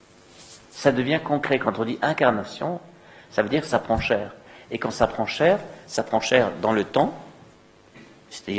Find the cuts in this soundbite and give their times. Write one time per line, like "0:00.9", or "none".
none